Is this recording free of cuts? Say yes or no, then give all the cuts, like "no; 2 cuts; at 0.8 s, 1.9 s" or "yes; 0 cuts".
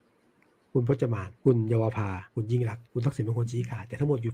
no; 3 cuts; at 1.3 s, 2.3 s, 2.8 s